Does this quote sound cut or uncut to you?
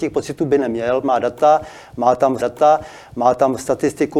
cut